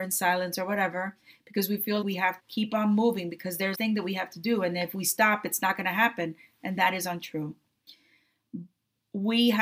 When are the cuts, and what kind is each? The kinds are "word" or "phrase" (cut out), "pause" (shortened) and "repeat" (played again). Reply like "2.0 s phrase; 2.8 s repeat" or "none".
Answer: 2.0 s word; 2.4 s word; 3.7 s word